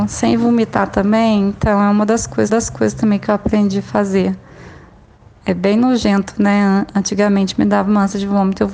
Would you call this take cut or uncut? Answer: cut